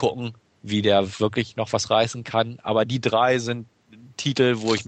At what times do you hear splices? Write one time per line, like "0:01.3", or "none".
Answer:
none